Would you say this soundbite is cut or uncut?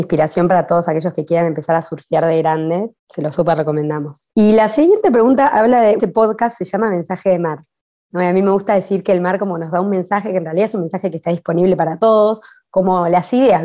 cut